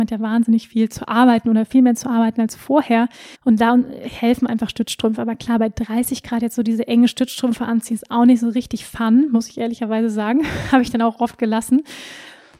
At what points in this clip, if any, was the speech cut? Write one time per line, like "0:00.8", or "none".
0:03.3

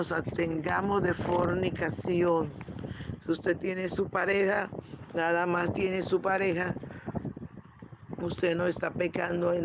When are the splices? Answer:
none

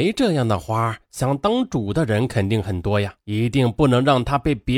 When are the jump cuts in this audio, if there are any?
0:03.2

